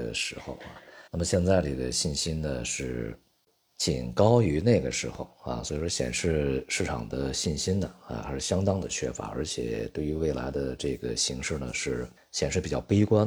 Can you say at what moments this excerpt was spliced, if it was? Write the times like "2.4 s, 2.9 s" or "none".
1.1 s, 12.2 s